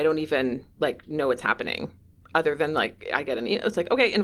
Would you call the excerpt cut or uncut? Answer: uncut